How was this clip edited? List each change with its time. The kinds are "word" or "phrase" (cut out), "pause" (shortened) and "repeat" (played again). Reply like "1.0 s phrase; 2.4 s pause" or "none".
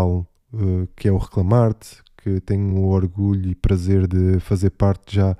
none